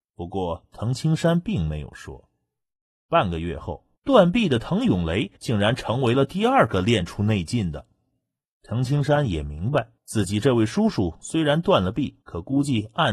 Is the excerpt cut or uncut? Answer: cut